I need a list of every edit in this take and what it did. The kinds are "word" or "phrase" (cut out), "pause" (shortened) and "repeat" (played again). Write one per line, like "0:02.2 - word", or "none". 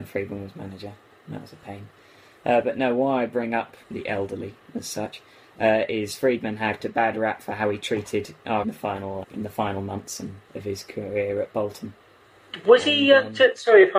0:03.8 - word
0:06.8 - word
0:08.6 - phrase
0:09.2 - word
0:10.4 - pause